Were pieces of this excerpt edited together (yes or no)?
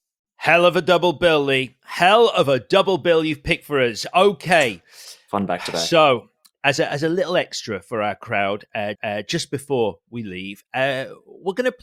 yes